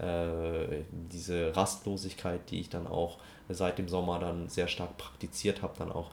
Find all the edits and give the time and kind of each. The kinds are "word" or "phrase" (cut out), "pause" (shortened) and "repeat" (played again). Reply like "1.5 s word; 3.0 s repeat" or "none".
none